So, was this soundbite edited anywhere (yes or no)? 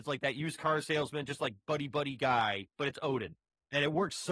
yes